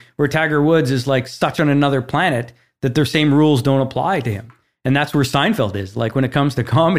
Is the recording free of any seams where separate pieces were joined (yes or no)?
yes